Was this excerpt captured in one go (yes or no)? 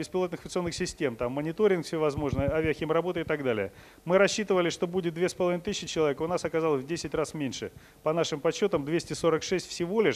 yes